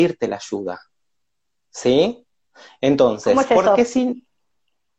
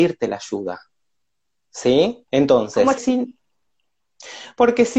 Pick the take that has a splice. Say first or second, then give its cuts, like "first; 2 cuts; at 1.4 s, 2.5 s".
second; 2 cuts; at 2.3 s, 3.0 s